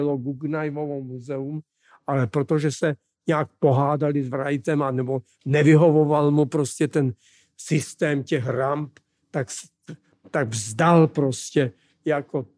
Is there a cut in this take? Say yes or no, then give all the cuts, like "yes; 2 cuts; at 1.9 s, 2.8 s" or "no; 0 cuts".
no; 0 cuts